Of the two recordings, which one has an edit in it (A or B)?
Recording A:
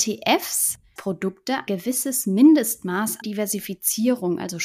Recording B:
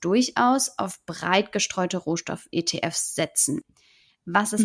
A